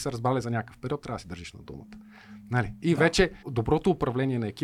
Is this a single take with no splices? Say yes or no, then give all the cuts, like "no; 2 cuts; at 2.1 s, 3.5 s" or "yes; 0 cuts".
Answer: no; 1 cut; at 3.4 s